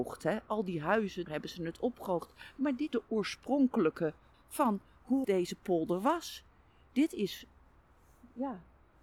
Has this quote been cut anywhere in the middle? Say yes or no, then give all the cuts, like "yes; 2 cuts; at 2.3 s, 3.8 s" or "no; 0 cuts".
yes; 4 cuts; at 1.3 s, 2.9 s, 4.3 s, 5.2 s